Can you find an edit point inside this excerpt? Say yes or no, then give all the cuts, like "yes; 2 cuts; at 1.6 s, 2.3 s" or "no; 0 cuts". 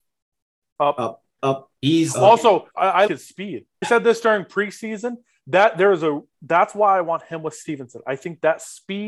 yes; 5 cuts; at 1.4 s, 1.8 s, 2.7 s, 3.1 s, 3.8 s